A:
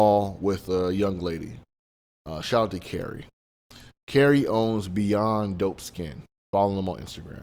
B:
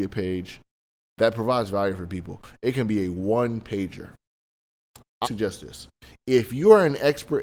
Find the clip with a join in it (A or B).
B